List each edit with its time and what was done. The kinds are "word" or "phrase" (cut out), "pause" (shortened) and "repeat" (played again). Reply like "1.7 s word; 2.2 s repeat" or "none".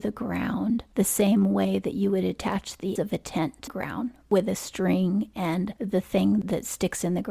3.0 s word; 3.7 s word